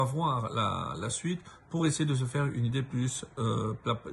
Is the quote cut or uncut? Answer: uncut